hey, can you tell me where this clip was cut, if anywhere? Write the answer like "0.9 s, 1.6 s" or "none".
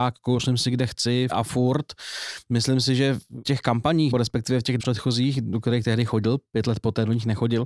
1.3 s, 3.4 s, 4.1 s, 4.8 s